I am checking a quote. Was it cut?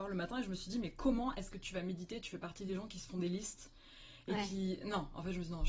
no; 0 cuts

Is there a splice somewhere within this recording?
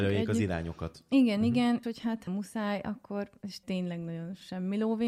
yes; 3 cuts; at 1.8 s, 2.3 s, 3.6 s

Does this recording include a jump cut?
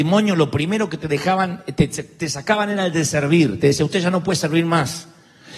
no; 0 cuts

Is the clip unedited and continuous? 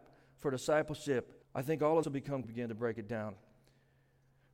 no; 3 cuts; at 1.4 s, 2.0 s, 2.4 s

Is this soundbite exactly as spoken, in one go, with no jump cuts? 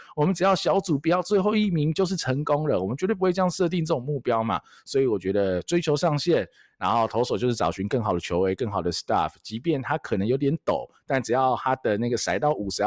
yes; 0 cuts

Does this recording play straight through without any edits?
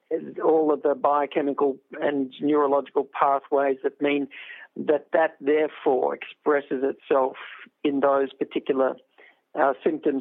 yes; 0 cuts

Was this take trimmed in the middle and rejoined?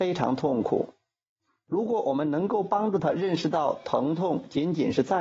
no; 0 cuts

